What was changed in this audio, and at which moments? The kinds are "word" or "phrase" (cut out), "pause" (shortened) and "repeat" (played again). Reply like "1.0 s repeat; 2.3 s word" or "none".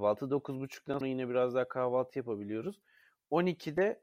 1.0 s word